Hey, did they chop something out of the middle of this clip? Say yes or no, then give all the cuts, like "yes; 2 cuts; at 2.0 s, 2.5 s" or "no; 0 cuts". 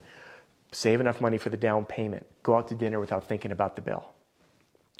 no; 0 cuts